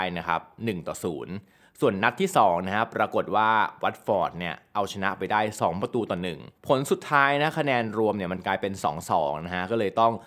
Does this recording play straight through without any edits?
no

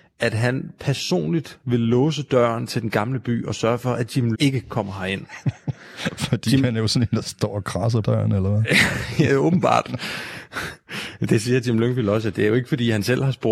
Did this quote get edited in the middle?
yes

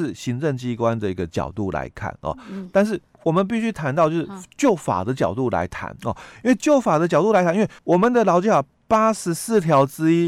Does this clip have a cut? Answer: yes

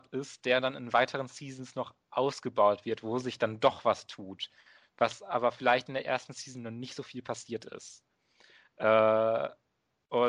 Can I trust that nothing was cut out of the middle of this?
yes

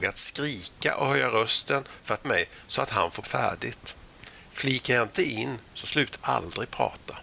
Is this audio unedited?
no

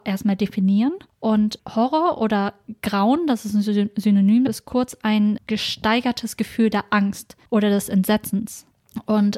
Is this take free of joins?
no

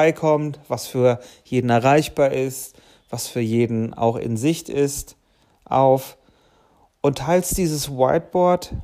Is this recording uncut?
yes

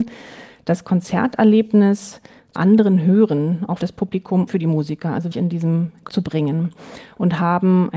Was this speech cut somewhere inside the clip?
yes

